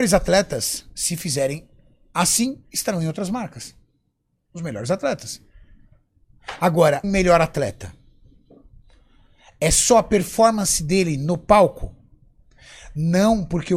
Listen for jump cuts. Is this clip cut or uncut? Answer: cut